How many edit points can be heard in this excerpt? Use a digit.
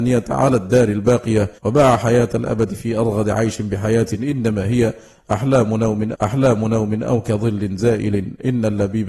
2